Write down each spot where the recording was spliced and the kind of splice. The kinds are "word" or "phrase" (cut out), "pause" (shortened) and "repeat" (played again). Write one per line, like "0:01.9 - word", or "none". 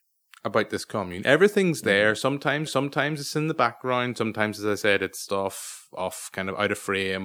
0:02.7 - repeat
0:05.3 - word